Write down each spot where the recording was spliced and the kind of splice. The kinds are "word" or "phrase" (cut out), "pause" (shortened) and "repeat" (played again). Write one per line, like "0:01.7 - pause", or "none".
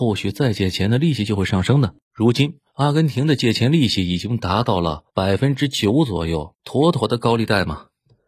0:02.0 - pause
0:02.7 - pause
0:05.1 - pause
0:06.6 - pause